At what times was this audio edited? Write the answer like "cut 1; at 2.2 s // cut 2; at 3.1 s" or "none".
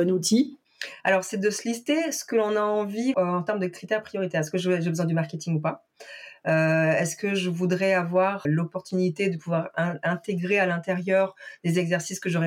cut 1; at 3.1 s // cut 2; at 8.4 s